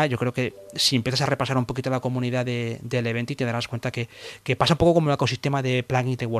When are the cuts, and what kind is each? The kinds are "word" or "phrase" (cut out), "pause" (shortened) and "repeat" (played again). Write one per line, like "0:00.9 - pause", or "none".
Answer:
none